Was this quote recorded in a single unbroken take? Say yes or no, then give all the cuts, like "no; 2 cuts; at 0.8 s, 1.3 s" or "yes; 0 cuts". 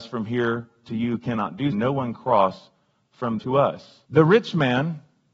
no; 3 cuts; at 1.7 s, 3.4 s, 4.1 s